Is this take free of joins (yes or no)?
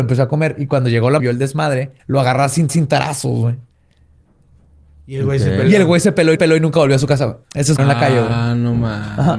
no